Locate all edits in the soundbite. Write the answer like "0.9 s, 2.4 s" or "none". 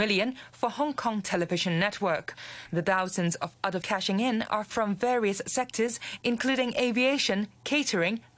3.8 s